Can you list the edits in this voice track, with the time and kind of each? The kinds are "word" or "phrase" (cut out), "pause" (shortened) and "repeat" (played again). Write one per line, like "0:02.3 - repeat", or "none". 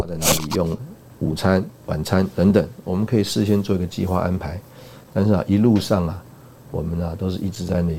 none